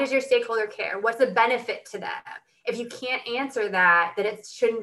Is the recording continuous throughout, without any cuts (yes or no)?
yes